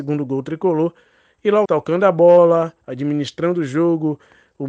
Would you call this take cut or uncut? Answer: cut